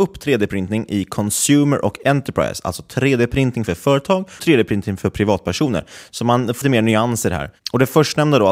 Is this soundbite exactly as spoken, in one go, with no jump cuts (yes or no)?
no